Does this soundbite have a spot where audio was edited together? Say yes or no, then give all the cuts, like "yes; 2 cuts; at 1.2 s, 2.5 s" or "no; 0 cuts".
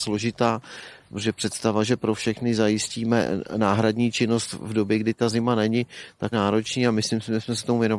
yes; 1 cut; at 6.3 s